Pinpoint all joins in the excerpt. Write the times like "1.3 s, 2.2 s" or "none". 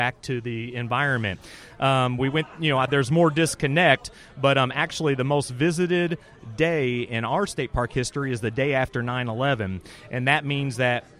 2.9 s

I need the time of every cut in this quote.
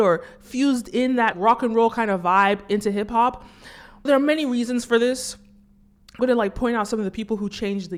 1.3 s, 4.1 s, 6.2 s

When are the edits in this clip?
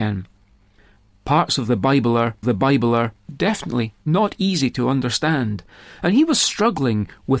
2.4 s

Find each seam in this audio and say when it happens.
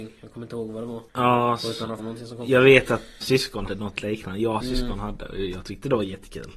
1.1 s, 2.0 s, 3.2 s, 3.7 s, 4.6 s

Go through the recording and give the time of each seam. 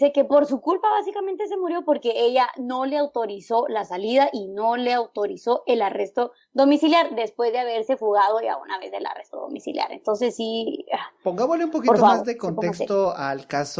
none

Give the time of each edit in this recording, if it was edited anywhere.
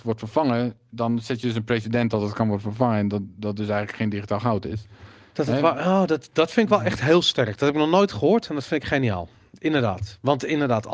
none

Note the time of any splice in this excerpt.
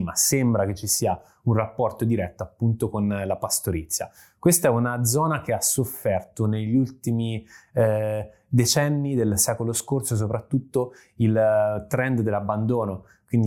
none

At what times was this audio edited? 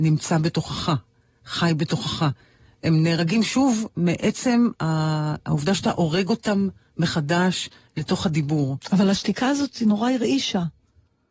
none

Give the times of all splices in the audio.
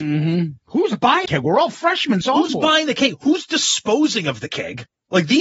1.3 s, 2.2 s

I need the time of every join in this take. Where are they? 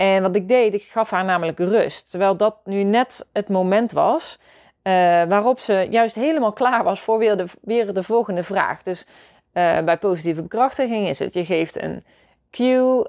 none

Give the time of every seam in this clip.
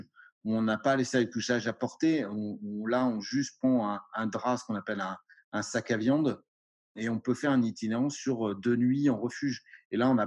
none

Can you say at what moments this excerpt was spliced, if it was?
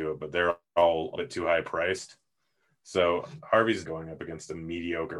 1.2 s, 3.9 s

